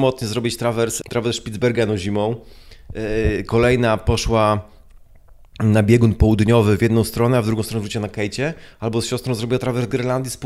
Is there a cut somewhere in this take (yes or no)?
yes